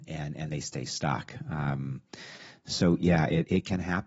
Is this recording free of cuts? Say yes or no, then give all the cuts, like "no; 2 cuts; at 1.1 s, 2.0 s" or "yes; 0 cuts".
yes; 0 cuts